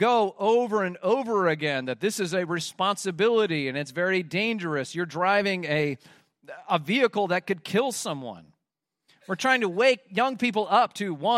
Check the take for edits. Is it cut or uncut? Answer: uncut